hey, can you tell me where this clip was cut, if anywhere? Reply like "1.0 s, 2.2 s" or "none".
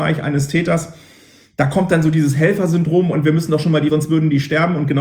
3.9 s